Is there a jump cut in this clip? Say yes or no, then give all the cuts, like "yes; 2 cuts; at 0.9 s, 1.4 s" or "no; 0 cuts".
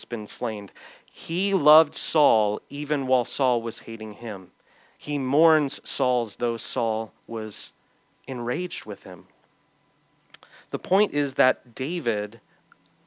yes; 2 cuts; at 6.4 s, 7.2 s